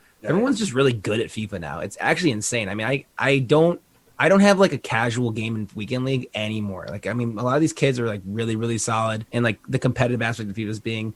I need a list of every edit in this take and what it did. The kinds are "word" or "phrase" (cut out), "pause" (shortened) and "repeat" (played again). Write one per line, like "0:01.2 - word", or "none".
0:09.3 - pause